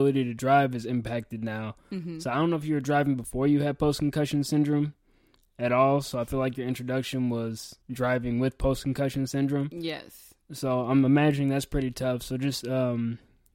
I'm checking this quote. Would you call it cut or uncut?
cut